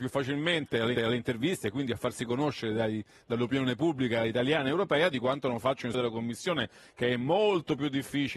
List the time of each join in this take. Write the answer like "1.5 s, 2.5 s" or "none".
1.0 s, 5.9 s